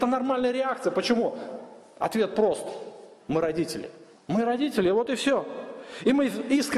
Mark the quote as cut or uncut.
cut